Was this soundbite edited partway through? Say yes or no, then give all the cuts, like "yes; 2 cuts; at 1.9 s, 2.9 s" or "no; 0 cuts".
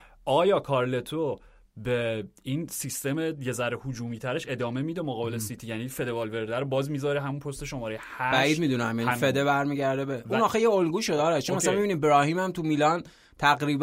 no; 0 cuts